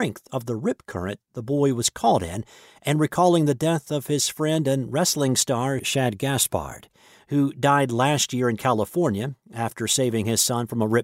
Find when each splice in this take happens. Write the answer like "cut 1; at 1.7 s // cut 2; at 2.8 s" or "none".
none